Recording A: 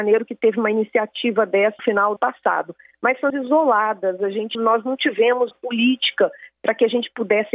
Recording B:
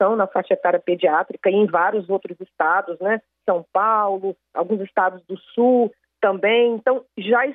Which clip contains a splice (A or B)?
A